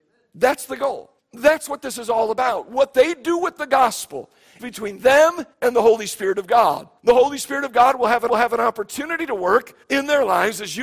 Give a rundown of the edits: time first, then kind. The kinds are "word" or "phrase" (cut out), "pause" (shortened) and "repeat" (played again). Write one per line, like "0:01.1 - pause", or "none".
0:01.2 - pause
0:04.6 - word
0:05.5 - pause
0:07.0 - pause
0:08.3 - repeat
0:09.8 - pause